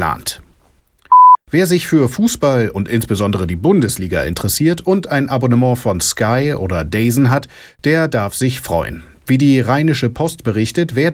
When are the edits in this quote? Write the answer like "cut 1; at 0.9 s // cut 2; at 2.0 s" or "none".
none